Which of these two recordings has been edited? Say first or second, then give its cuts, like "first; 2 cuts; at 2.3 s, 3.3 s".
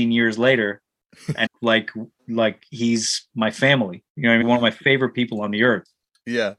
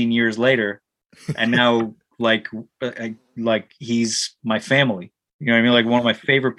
first; 4 cuts; at 1.5 s, 2.2 s, 4.1 s, 4.4 s